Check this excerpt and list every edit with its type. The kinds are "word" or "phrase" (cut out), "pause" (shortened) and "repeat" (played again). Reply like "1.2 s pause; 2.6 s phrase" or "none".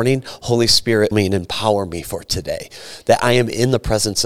1.1 s word